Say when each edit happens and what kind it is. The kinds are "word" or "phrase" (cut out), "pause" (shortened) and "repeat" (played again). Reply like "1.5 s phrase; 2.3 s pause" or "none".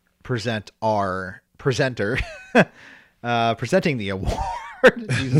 1.5 s pause